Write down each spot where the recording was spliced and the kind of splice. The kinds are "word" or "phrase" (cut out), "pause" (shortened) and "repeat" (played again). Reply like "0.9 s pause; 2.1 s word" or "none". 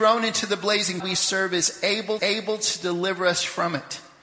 1.0 s phrase; 2.2 s repeat